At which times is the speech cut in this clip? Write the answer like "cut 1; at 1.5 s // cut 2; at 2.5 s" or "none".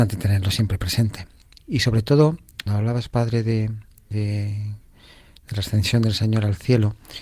cut 1; at 2.7 s // cut 2; at 4.1 s